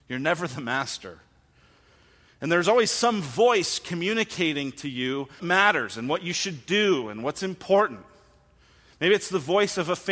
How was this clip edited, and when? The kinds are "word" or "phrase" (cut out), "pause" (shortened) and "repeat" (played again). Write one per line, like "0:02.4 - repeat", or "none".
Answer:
0:05.4 - word